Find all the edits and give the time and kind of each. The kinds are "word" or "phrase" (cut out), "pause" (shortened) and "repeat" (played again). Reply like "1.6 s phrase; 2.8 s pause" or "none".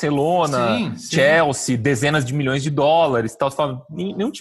none